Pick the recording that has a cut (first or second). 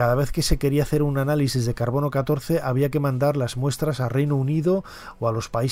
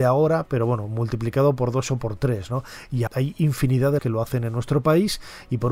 second